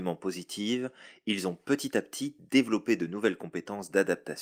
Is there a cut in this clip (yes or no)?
no